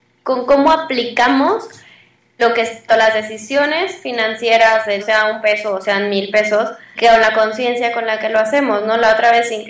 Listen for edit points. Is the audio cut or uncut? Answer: cut